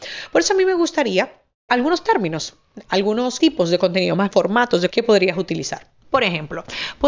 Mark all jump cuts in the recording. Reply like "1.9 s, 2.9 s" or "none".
1.7 s, 3.4 s, 4.3 s, 4.9 s